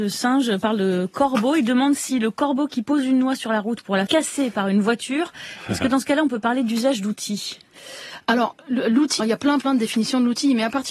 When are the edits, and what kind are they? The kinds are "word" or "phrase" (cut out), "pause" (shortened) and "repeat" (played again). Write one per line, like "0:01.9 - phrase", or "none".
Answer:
0:04.1 - word
0:09.2 - word
0:09.6 - word